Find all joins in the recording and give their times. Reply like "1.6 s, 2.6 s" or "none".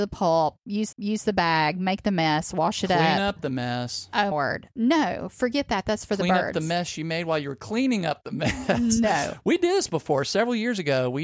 0.9 s, 4.3 s